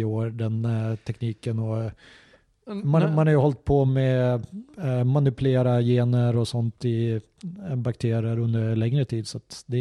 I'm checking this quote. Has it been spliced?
no; 0 cuts

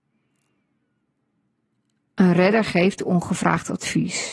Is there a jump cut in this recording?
no; 0 cuts

